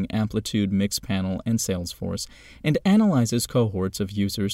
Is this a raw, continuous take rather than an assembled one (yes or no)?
yes